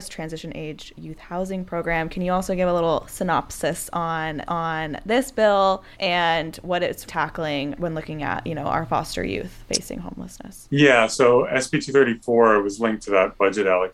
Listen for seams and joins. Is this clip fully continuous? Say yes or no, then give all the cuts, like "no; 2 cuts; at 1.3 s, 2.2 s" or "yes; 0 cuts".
no; 3 cuts; at 4.5 s, 5.9 s, 7.1 s